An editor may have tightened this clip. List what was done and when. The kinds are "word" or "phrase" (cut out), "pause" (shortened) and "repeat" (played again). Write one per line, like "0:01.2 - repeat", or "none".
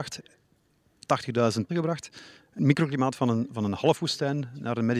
0:01.7 - word
0:02.6 - word
0:03.2 - word